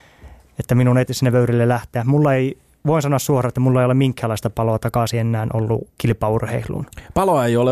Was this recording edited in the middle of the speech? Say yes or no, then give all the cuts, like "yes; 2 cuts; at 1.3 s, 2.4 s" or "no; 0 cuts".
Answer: yes; 2 cuts; at 1.1 s, 5.9 s